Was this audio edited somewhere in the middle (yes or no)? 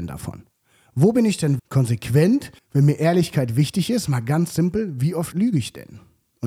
yes